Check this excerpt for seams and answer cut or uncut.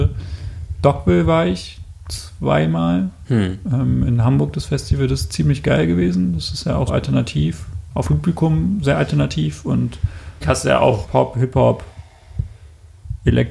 cut